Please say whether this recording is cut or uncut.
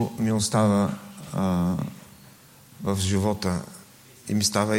uncut